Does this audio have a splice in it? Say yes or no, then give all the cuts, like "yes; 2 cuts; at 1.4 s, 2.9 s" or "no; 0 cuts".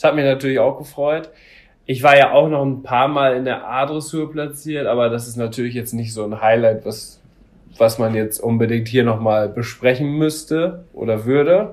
no; 0 cuts